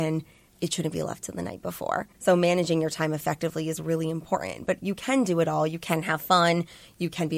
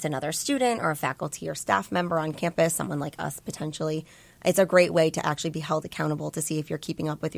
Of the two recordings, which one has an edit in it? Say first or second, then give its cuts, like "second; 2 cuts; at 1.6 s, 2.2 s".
first; 1 cut; at 2.1 s